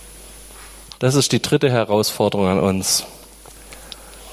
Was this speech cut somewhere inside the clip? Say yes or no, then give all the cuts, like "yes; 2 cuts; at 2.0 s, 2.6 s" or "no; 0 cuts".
no; 0 cuts